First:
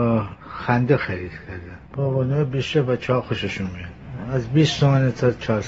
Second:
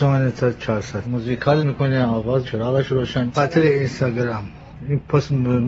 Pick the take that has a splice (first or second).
second